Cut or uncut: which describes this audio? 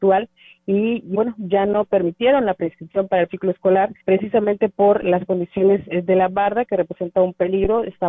cut